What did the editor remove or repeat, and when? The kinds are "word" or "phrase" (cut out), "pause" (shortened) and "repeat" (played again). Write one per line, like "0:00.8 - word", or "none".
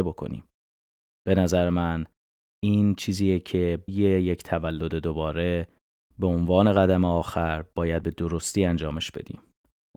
0:03.9 - word
0:08.0 - word